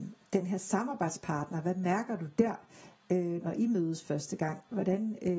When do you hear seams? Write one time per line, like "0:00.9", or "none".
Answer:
0:03.4